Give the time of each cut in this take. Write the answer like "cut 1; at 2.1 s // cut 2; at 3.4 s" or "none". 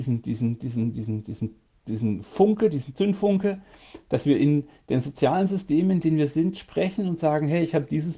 none